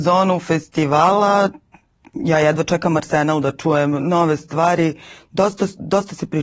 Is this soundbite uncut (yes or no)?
yes